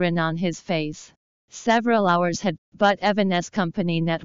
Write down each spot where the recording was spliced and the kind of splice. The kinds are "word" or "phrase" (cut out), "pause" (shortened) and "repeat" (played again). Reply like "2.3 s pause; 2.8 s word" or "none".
2.6 s word